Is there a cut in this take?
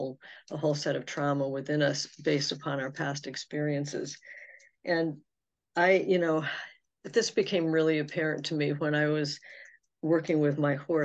no; 0 cuts

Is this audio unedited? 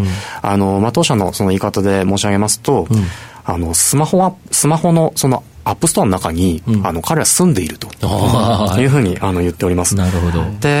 yes; 0 cuts

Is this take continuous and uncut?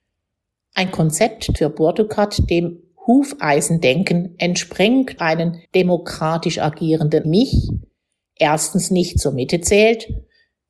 no; 4 cuts; at 1.6 s, 5.2 s, 5.7 s, 7.2 s

